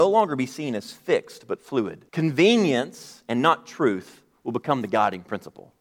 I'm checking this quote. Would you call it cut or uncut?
cut